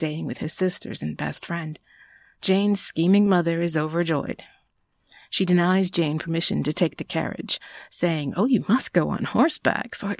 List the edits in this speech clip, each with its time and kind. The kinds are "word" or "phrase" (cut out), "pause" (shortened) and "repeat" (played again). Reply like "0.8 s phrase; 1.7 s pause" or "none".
none